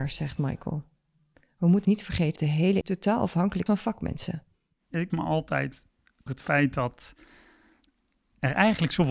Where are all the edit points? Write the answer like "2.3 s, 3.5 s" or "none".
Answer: 1.8 s, 2.4 s, 2.8 s, 3.7 s, 5.1 s, 6.3 s